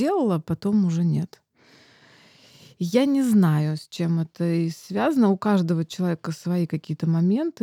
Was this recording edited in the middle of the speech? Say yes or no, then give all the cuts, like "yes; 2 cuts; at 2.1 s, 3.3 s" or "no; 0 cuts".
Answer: no; 0 cuts